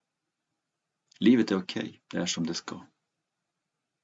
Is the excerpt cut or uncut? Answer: cut